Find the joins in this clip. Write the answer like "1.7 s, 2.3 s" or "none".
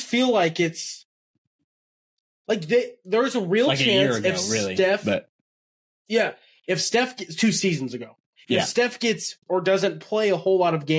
9.4 s